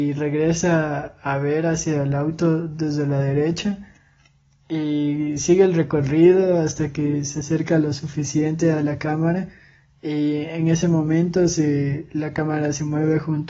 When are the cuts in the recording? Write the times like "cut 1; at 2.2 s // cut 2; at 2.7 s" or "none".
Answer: none